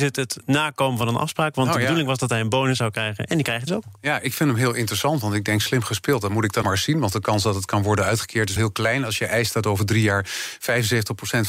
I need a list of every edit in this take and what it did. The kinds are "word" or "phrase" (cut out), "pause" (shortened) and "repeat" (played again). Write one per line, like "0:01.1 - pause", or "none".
0:03.7 - word
0:06.6 - word
0:08.6 - word